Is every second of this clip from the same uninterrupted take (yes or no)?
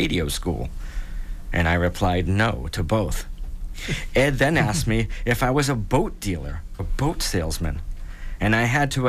no